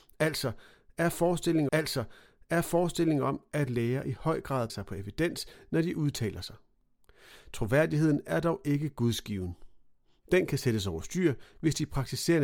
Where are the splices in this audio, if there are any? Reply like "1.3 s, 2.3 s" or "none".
1.7 s, 4.7 s